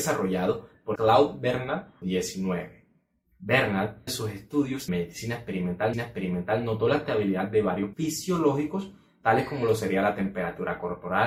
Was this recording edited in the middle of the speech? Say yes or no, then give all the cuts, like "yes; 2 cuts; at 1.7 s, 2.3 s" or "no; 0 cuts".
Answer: yes; 6 cuts; at 1.0 s, 2.0 s, 4.1 s, 4.9 s, 5.9 s, 7.9 s